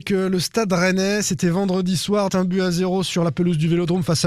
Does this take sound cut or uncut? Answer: cut